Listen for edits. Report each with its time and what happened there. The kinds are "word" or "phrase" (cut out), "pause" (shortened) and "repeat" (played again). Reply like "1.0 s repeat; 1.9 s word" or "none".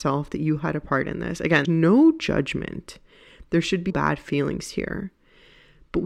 1.6 s word; 3.9 s word

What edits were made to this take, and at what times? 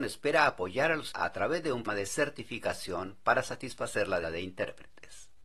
1.1 s word; 1.9 s word; 4.2 s word

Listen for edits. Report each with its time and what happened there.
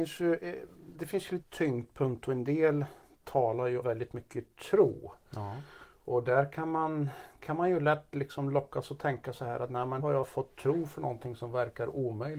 0.9 s word; 1.4 s word; 3.8 s word; 10.0 s word

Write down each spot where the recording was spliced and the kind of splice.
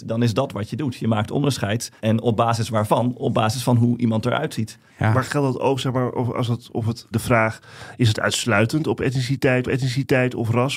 2.0 s pause; 4.9 s pause; 5.2 s phrase; 7.1 s word; 9.6 s repeat

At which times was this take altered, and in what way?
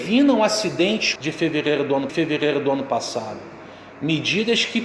1.2 s phrase; 2.1 s repeat

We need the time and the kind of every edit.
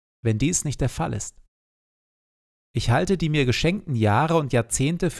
none

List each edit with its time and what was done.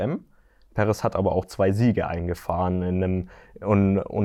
none

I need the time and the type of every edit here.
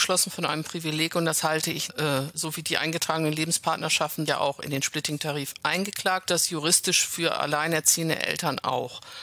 1.9 s phrase; 2.3 s word; 4.3 s word; 6.3 s phrase

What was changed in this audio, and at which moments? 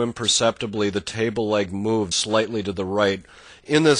2.1 s word

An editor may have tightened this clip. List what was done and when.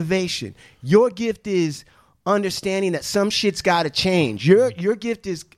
none

